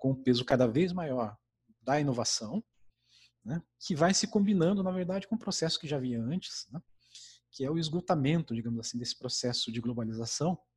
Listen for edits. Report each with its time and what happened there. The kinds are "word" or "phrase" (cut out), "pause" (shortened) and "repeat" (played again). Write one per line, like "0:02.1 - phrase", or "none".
none

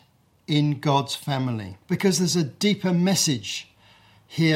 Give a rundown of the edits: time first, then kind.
0:01.8 - pause

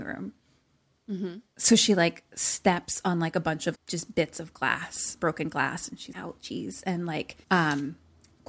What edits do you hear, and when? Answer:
0:03.7 - word
0:06.1 - word
0:07.4 - pause

